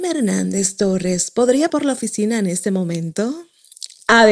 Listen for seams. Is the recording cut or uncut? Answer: cut